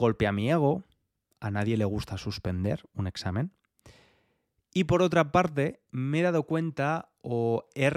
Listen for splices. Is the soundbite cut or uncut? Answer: uncut